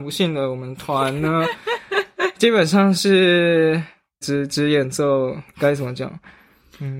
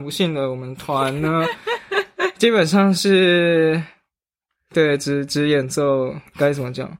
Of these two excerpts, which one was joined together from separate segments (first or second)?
first